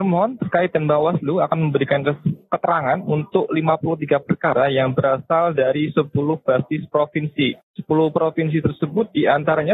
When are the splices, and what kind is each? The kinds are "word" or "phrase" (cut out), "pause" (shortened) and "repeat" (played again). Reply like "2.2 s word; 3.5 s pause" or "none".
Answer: 7.7 s pause